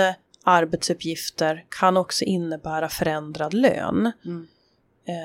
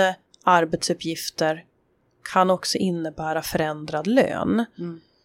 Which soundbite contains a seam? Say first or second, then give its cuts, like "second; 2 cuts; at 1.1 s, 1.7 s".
first; 1 cut; at 1.7 s